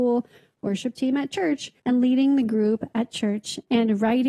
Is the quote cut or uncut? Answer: cut